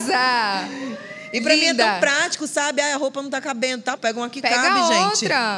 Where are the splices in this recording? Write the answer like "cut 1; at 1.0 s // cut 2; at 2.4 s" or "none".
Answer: cut 1; at 4.0 s